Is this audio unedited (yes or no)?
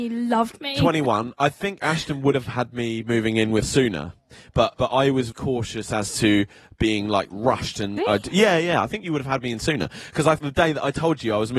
no